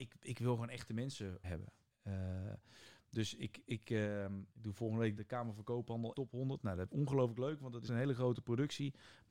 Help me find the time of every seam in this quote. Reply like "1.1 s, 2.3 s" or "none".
1.4 s, 4.5 s, 5.2 s, 6.1 s, 6.9 s, 7.9 s